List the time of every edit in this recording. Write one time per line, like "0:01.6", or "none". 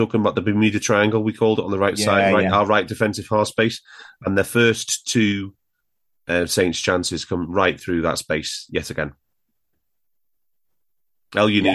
none

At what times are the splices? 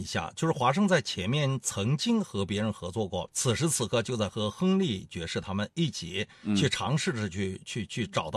0:03.3

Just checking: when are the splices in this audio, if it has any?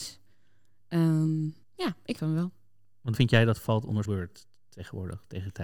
0:01.6
0:02.2
0:03.2
0:04.1

